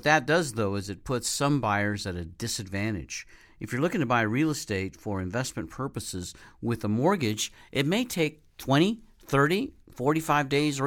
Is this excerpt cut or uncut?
uncut